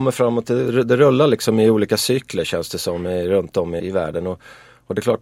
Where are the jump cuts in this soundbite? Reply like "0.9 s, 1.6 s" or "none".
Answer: 3.8 s